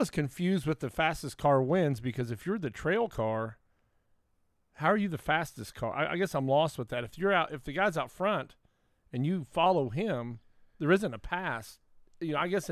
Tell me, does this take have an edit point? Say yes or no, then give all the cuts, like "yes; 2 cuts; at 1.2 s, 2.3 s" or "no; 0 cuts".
no; 0 cuts